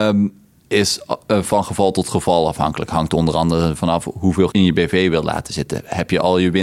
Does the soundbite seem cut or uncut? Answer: cut